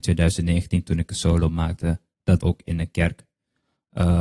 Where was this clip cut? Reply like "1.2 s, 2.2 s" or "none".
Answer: 2.4 s